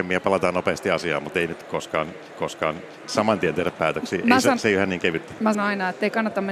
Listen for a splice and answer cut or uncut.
cut